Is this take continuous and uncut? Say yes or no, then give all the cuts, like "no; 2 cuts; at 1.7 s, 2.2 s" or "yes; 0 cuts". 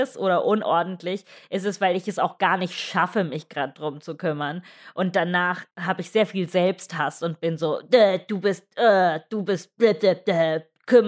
no; 1 cut; at 5.7 s